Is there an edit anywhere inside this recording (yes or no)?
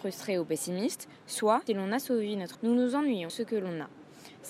yes